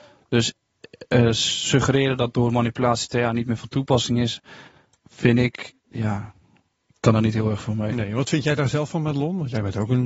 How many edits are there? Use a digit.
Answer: 0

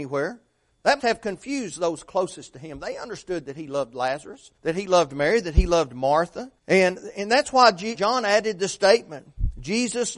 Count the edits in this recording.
4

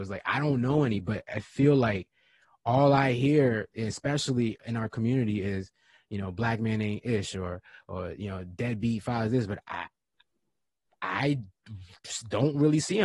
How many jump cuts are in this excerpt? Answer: 0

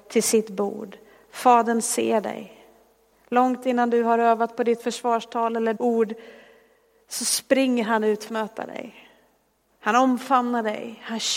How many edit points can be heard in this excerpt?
2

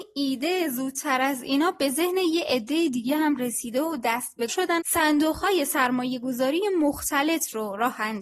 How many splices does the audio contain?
2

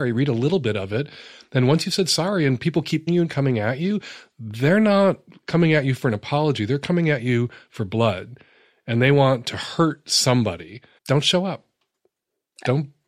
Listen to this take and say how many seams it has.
2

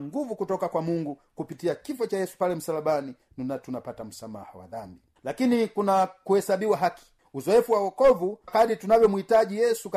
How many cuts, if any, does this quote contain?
1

